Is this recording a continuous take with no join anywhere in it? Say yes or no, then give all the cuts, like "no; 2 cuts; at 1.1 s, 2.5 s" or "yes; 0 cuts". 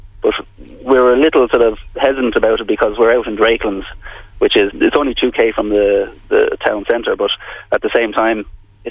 no; 1 cut; at 4.7 s